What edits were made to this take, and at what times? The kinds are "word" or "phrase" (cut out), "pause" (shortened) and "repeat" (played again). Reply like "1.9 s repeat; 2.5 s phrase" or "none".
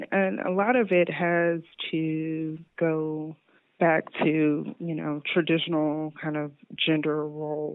none